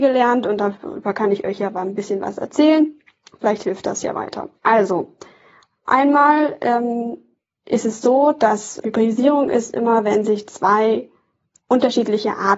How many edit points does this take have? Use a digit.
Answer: 2